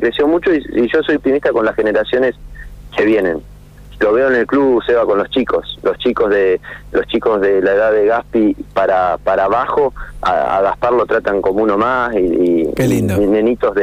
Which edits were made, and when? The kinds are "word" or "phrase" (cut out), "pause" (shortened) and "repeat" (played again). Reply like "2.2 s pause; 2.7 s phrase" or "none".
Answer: 1.2 s word